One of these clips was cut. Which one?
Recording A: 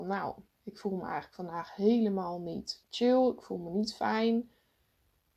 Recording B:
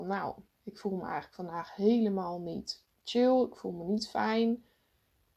A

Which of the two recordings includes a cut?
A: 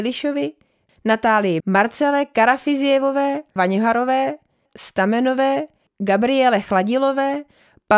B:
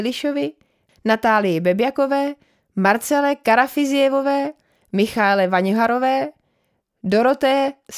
A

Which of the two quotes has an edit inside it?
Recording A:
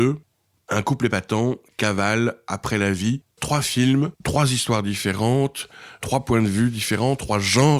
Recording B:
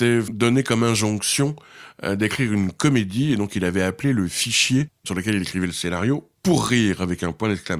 A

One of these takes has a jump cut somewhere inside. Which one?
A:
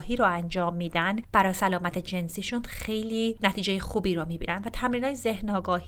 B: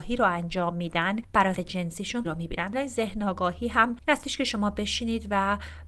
B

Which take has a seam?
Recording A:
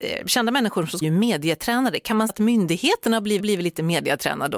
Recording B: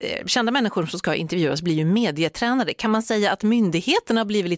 A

